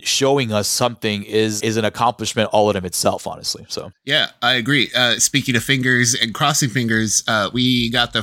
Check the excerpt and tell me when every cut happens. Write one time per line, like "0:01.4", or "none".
0:01.6